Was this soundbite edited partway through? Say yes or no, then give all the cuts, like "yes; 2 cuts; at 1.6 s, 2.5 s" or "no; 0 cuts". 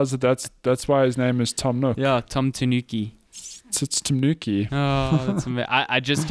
no; 0 cuts